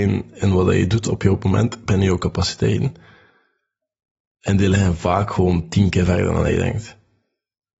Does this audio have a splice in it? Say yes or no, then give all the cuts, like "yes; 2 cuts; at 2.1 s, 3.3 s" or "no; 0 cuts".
no; 0 cuts